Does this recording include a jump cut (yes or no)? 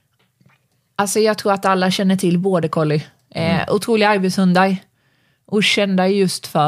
no